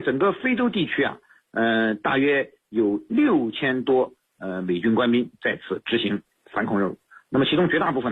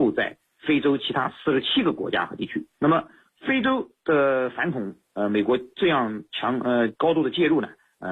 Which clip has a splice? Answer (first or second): second